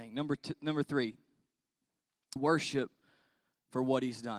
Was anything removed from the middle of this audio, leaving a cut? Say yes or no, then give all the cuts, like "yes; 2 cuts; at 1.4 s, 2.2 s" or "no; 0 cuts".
yes; 1 cut; at 2.4 s